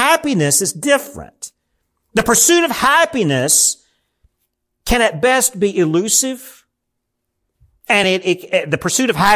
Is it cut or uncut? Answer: uncut